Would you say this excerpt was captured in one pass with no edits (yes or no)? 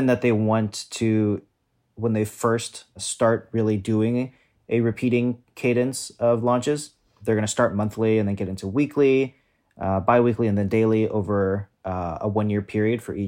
yes